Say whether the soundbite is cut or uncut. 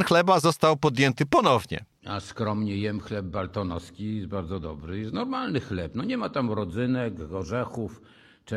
uncut